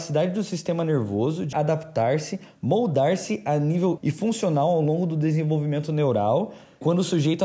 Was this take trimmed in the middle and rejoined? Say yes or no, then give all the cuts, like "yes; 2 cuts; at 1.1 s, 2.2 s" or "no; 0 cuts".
yes; 2 cuts; at 1.5 s, 4.0 s